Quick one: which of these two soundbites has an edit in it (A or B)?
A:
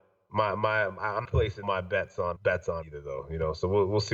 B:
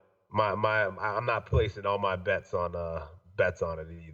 A